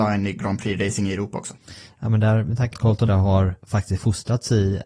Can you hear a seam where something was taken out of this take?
yes; 3 cuts; at 2.7 s, 3.1 s, 3.6 s

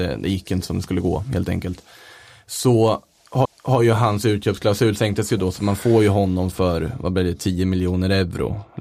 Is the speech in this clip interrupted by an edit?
yes; 1 cut; at 3.4 s

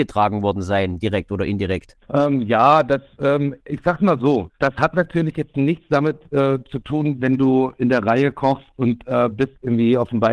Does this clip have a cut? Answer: yes; 2 cuts; at 2.0 s, 4.6 s

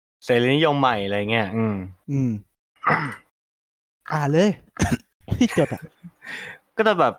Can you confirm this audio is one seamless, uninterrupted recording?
yes; 0 cuts

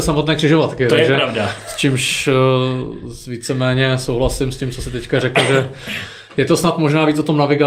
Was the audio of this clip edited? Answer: no; 0 cuts

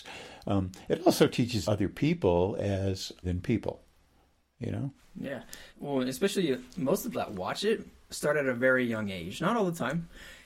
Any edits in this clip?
yes; 4 cuts; at 1.6 s, 3.2 s, 5.7 s, 7.1 s

